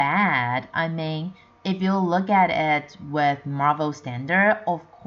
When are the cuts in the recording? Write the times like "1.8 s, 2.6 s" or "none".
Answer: none

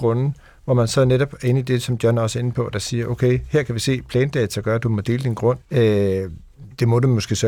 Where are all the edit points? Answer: 5.6 s

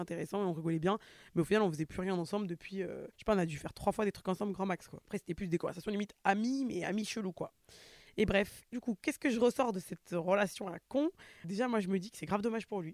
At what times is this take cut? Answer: 3.1 s, 8.7 s, 11.4 s

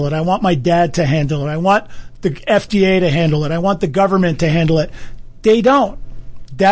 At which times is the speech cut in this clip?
none

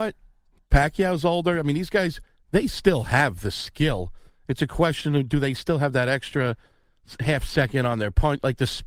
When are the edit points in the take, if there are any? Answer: none

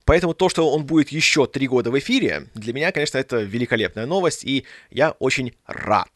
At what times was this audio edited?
none

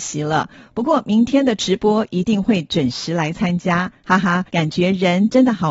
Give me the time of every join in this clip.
4.5 s

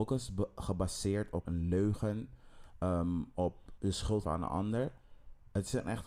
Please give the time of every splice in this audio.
1.4 s, 3.8 s, 4.2 s

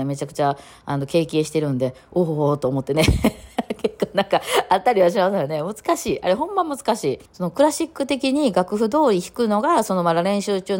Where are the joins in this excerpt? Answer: 7.3 s

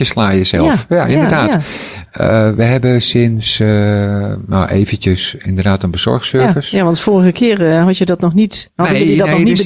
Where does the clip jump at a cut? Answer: none

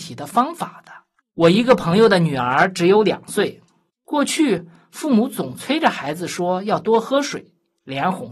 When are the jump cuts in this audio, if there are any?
none

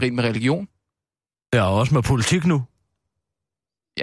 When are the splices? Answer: none

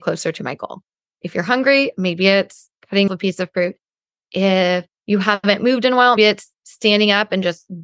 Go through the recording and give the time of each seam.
3.1 s, 5.0 s, 6.2 s

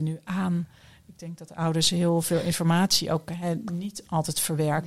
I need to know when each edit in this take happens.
none

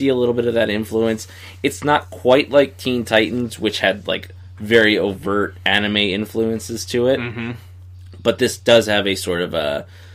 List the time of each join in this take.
none

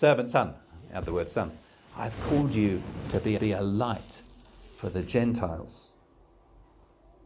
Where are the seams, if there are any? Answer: 3.4 s

